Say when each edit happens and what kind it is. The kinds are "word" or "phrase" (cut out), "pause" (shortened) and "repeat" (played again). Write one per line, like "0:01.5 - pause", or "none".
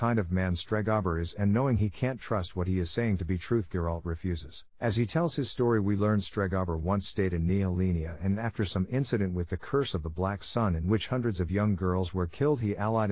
0:04.7 - pause

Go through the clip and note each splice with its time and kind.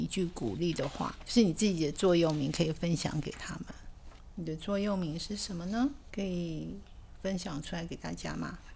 none

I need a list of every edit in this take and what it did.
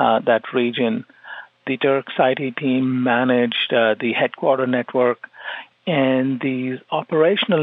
none

